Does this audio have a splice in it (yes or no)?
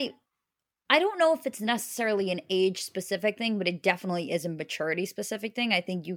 no